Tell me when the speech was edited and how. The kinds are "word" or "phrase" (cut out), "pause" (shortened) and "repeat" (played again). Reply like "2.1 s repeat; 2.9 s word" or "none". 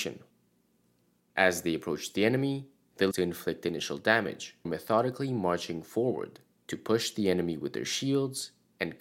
3.1 s phrase; 4.7 s word